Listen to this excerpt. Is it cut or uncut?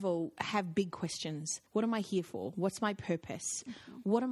cut